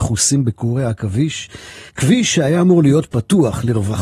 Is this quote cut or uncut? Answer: cut